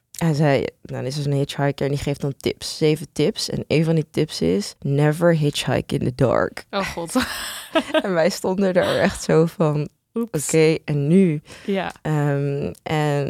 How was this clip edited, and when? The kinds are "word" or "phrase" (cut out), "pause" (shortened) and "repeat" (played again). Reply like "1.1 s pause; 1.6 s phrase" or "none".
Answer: 4.8 s pause